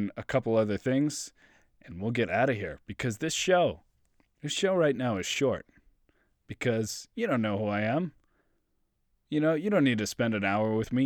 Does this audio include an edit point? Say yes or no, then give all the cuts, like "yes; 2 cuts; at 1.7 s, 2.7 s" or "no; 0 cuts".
no; 0 cuts